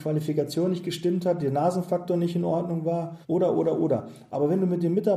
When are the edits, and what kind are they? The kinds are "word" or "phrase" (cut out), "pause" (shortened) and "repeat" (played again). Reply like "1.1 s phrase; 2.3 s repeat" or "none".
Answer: 3.2 s pause